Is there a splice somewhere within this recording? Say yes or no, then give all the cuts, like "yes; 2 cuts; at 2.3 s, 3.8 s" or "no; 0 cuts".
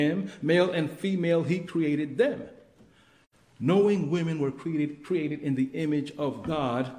no; 0 cuts